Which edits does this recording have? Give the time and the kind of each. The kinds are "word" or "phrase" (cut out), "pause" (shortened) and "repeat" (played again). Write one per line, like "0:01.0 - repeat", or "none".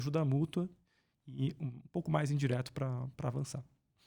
none